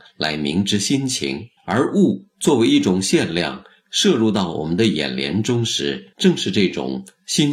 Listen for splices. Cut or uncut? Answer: cut